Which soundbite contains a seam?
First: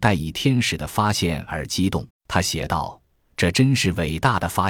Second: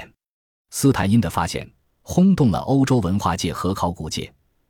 first; 1 cut; at 2.1 s

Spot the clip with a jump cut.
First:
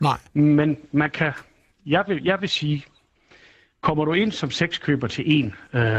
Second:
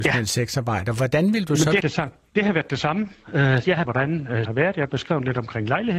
second; 3 cuts; at 1.8 s, 3.8 s, 4.4 s

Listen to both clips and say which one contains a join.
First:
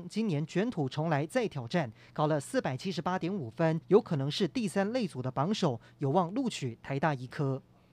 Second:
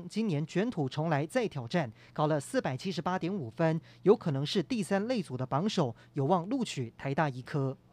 first; 1 cut; at 3.8 s

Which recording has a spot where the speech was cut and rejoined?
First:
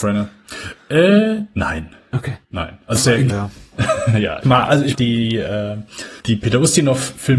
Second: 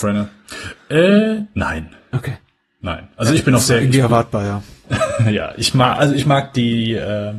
first; 6 cuts; at 2.4 s, 2.9 s, 3.3 s, 4.4 s, 4.9 s, 6.2 s

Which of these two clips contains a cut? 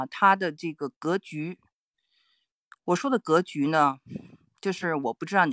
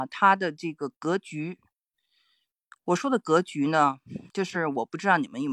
second; 1 cut; at 4.3 s

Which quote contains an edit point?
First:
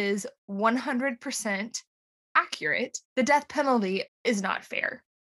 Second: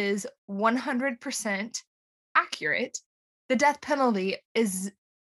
first; 2 cuts; at 3.1 s, 4.1 s

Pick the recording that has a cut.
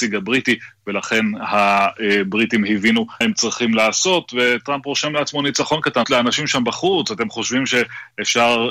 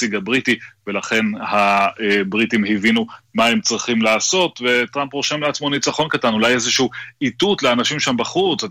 first; 2 cuts; at 3.2 s, 6.0 s

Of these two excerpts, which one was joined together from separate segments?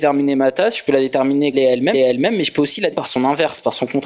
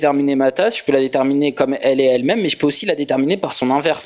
first; 3 cuts; at 1.5 s, 1.9 s, 2.9 s

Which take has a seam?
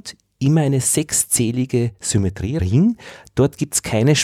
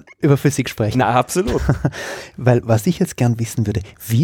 first; 1 cut; at 2.6 s

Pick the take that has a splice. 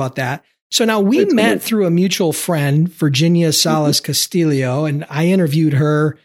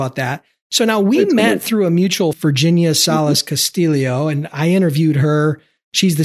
second; 1 cut; at 2.3 s

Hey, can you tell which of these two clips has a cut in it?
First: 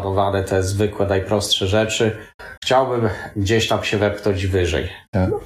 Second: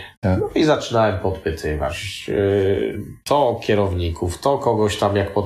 first; 1 cut; at 2.6 s

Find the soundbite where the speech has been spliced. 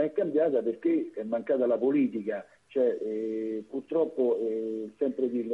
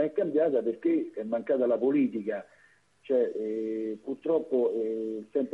first; 1 cut; at 2.5 s

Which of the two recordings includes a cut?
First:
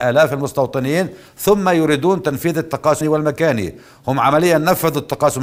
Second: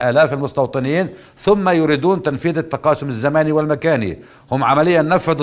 first; 1 cut; at 3.0 s

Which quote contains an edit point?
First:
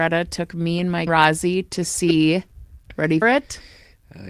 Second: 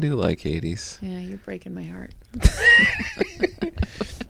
first; 2 cuts; at 1.1 s, 3.2 s

